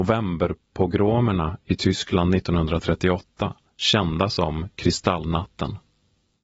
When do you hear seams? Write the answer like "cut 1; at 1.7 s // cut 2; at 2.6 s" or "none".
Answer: cut 1; at 3.7 s